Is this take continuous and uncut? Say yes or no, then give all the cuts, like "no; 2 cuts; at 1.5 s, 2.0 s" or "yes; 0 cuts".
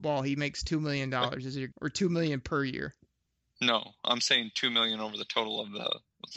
no; 1 cut; at 1.7 s